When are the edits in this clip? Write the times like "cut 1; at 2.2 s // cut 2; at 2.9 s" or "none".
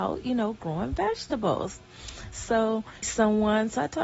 cut 1; at 3.0 s